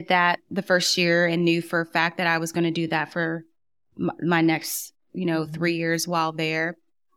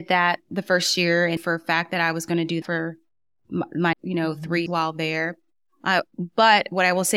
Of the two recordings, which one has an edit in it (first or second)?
second